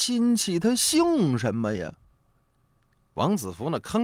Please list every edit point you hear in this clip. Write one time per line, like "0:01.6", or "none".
none